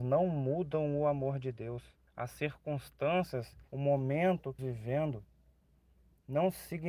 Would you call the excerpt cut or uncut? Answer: cut